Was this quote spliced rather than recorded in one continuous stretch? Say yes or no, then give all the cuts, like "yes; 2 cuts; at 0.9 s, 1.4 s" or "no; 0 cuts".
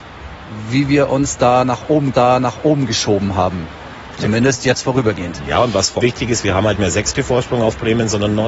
yes; 4 cuts; at 2.1 s, 6.0 s, 6.8 s, 7.1 s